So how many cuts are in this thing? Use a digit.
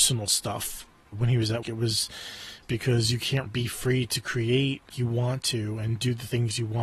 5